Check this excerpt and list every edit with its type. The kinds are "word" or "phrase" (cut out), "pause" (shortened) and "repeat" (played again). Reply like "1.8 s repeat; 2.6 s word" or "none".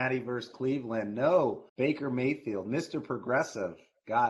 1.7 s pause